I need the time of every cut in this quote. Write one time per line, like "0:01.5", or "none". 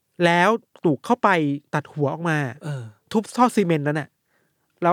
0:01.7